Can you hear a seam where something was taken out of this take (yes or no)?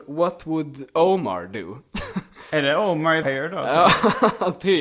yes